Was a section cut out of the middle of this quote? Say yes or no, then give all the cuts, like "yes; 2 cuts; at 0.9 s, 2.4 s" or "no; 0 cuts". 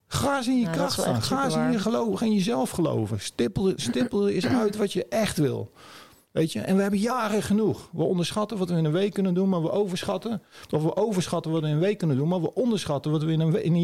no; 0 cuts